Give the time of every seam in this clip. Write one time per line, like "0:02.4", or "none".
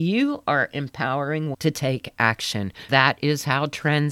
0:01.5
0:02.9

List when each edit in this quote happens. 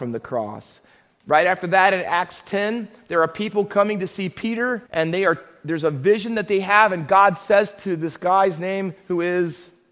0:04.9

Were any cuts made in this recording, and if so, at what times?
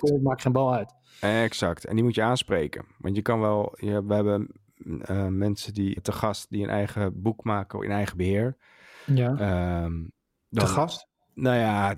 0:06.0

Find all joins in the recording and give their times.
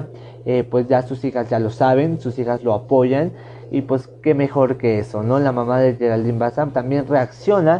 0:06.7

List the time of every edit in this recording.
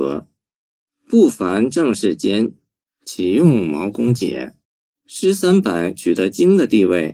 0:04.6

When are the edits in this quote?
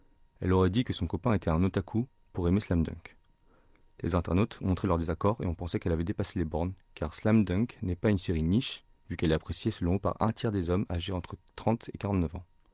none

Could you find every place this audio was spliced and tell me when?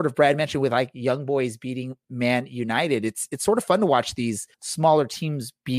0:04.5

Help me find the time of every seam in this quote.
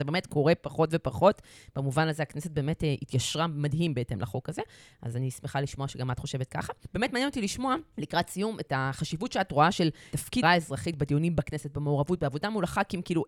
0:10.4

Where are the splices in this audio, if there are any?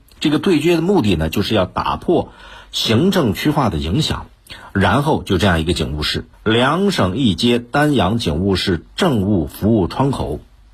0:06.3

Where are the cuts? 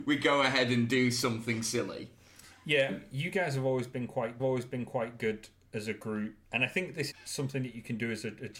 0:02.9
0:04.4
0:06.4
0:07.1

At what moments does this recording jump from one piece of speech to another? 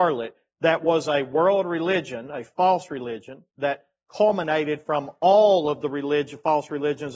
0:03.5

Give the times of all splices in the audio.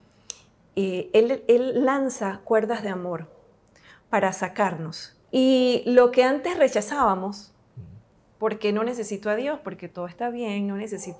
0:05.2

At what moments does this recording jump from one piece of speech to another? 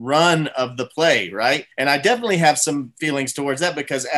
0:01.7

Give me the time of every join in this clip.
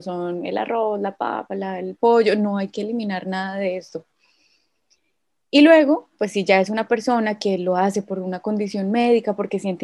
none

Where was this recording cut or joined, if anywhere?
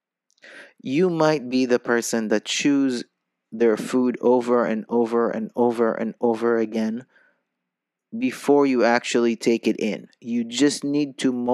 none

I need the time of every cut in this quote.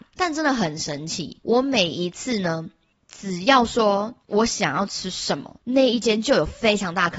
none

